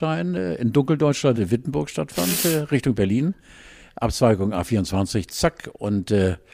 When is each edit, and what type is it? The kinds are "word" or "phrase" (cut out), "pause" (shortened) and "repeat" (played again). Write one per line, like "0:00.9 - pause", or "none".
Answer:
none